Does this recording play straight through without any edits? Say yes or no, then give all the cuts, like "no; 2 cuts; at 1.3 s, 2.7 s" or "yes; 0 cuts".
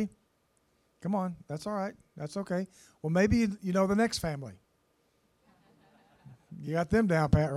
yes; 0 cuts